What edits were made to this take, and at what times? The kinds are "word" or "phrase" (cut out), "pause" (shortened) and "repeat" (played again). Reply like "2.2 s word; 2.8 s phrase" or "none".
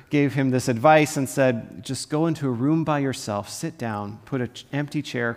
none